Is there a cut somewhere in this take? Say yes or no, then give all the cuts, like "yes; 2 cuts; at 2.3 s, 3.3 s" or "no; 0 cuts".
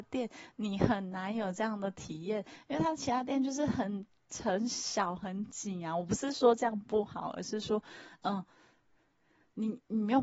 no; 0 cuts